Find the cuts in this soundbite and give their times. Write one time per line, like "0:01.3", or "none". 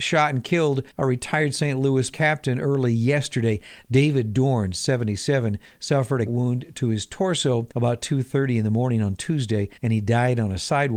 0:00.9
0:02.1
0:06.3
0:07.7
0:09.8